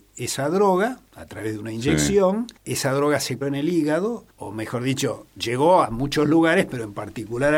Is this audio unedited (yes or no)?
no